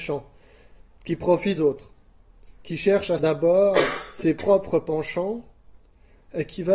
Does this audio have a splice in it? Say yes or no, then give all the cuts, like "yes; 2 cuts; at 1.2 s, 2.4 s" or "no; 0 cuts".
yes; 2 cuts; at 1.6 s, 3.2 s